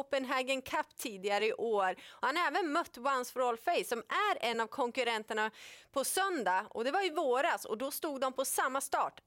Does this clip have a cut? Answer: no; 0 cuts

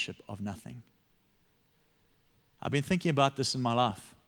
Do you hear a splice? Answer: no; 0 cuts

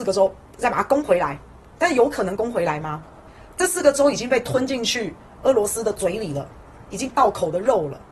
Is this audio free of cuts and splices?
yes; 0 cuts

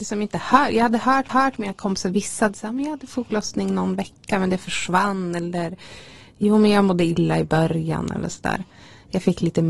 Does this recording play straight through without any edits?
no; 1 cut; at 1.3 s

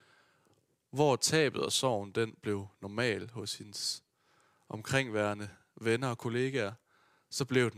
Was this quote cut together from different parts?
no; 0 cuts

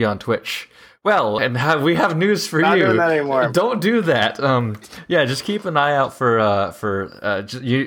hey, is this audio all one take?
no; 1 cut; at 1.4 s

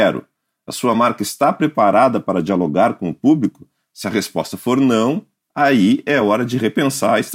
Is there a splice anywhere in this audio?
no; 0 cuts

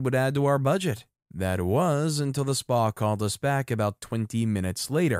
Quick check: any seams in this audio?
no; 0 cuts

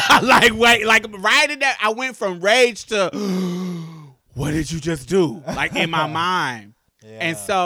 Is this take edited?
no; 0 cuts

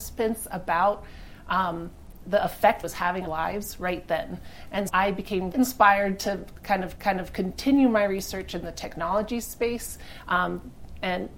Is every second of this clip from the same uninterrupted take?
no; 6 cuts; at 2.2 s, 2.8 s, 3.3 s, 4.9 s, 5.5 s, 7.0 s

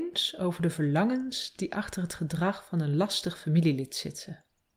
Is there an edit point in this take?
no; 0 cuts

